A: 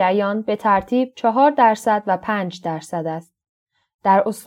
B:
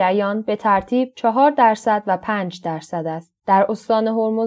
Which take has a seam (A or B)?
B